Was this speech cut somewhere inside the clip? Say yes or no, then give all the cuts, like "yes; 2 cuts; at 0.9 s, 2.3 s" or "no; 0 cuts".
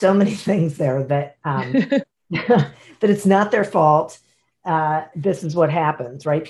yes; 1 cut; at 5.1 s